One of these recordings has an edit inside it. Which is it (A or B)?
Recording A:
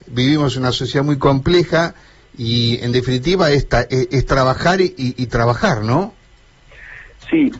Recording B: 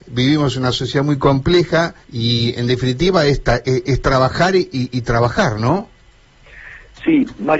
B